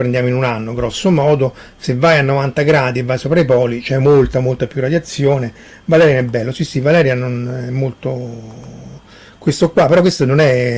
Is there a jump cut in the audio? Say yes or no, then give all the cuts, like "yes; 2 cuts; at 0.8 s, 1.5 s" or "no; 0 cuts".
no; 0 cuts